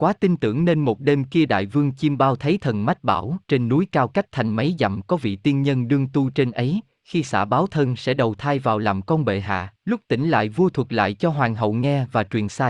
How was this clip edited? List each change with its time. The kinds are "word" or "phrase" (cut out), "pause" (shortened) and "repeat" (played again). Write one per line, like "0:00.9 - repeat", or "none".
0:03.4 - pause
0:09.8 - pause